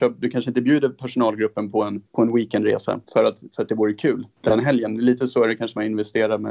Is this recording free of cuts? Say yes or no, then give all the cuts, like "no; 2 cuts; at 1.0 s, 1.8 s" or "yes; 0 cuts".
no; 3 cuts; at 2.1 s, 3.0 s, 4.3 s